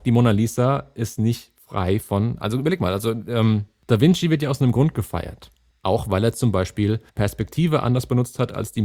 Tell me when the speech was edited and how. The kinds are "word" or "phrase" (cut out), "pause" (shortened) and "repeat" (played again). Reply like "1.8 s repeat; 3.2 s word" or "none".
5.7 s pause; 7.1 s pause